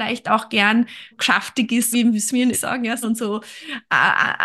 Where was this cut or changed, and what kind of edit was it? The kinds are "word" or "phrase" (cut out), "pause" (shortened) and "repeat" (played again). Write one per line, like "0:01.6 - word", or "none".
0:01.1 - word
0:01.9 - word
0:02.5 - word
0:03.0 - word